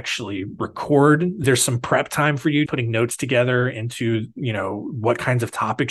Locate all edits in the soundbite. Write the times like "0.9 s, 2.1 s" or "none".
1.4 s, 2.7 s

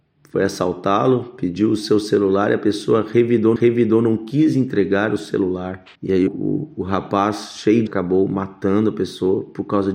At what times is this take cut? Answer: 3.6 s, 5.9 s, 6.3 s, 7.9 s

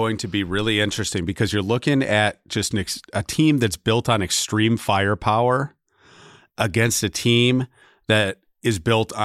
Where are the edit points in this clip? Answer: none

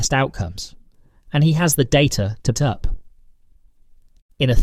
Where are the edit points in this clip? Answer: 2.5 s

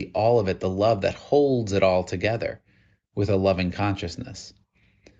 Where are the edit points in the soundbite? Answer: none

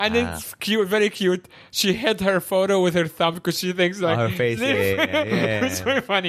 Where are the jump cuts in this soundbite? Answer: none

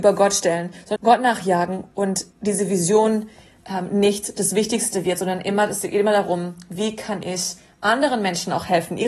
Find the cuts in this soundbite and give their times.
1.0 s, 2.3 s

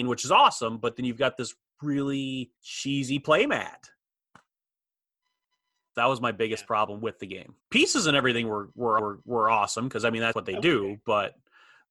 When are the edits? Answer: 2.6 s, 5.9 s, 7.6 s, 9.0 s, 10.3 s

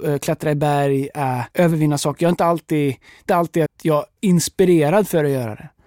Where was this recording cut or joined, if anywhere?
1.5 s, 3.3 s, 3.7 s, 4.2 s

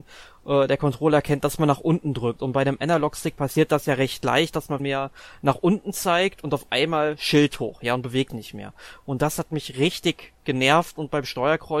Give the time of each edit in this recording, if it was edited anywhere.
4.8 s, 8.3 s

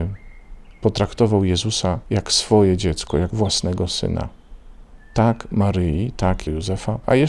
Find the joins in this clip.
3.3 s

